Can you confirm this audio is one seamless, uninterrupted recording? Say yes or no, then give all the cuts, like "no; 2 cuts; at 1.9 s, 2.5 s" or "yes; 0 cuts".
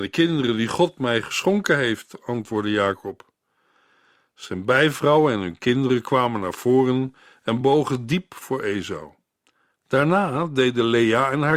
yes; 0 cuts